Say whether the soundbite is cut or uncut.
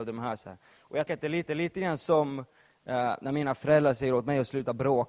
cut